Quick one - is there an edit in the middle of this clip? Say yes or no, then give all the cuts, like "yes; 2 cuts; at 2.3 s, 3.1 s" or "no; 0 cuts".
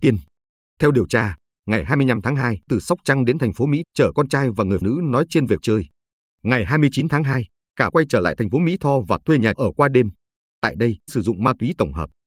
yes; 7 cuts; at 2.7 s, 3.8 s, 4.8 s, 5.6 s, 7.9 s, 9.6 s, 11.1 s